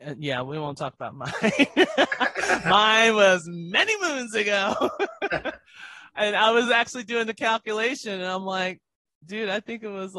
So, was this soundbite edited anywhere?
no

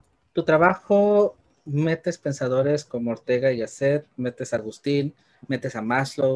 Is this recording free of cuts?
yes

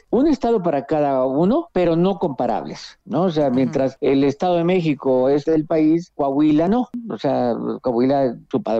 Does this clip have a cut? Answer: yes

